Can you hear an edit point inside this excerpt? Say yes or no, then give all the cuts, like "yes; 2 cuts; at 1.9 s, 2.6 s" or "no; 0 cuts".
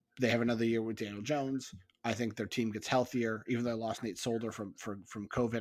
no; 0 cuts